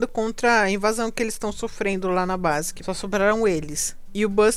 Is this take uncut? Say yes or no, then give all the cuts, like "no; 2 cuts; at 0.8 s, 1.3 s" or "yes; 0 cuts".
no; 1 cut; at 2.8 s